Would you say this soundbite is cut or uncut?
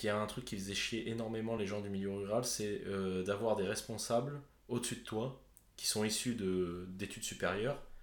uncut